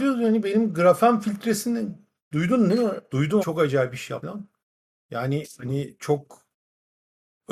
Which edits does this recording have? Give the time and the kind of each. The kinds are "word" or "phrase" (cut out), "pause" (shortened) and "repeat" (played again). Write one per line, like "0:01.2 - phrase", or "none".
0:03.4 - word
0:04.2 - word
0:04.6 - pause